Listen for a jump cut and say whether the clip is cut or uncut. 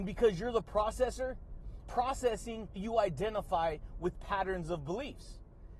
cut